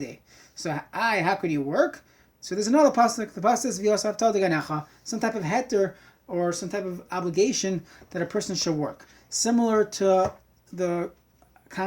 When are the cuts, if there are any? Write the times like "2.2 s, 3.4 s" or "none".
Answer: none